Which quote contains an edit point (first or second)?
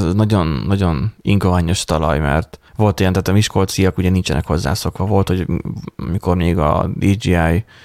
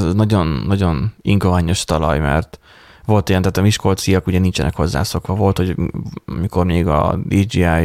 first